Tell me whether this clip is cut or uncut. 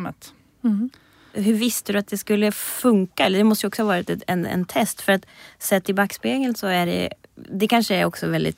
uncut